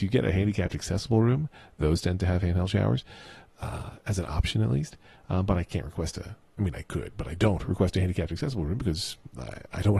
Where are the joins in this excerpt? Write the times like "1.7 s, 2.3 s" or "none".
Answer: none